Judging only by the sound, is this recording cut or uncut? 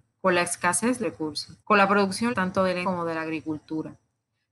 cut